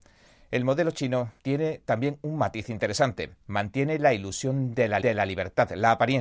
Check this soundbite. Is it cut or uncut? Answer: cut